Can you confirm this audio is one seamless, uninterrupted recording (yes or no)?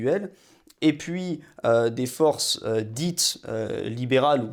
yes